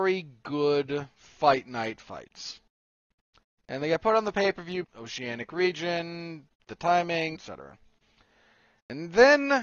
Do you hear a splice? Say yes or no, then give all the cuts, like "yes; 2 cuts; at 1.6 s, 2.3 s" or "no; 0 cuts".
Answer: yes; 2 cuts; at 4.8 s, 7.4 s